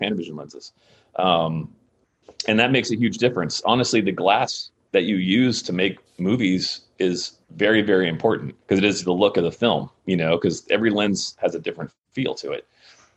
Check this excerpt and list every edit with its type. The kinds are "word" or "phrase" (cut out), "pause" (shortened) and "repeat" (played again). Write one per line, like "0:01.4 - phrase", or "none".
0:07.4 - pause
0:08.6 - pause